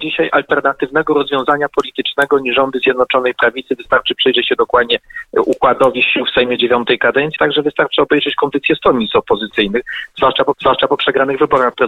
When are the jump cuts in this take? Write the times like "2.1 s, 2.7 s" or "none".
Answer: 7.4 s, 10.5 s